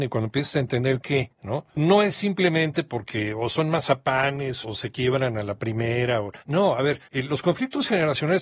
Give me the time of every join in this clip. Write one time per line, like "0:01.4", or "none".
0:01.0
0:04.6
0:06.4
0:07.1